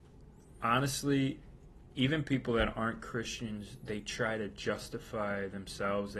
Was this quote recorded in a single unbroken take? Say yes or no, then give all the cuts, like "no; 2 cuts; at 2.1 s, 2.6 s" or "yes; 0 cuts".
yes; 0 cuts